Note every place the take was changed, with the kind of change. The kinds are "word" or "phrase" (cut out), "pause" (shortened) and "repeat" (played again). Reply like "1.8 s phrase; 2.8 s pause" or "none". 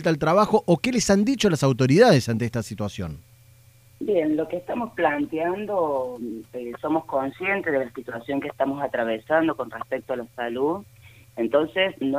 none